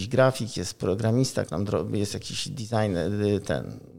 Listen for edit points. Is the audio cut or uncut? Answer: cut